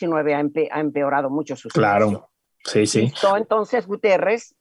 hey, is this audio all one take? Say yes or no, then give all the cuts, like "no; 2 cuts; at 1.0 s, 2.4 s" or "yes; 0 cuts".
yes; 0 cuts